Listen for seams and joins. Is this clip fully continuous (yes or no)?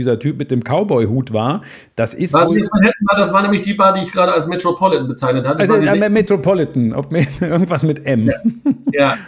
yes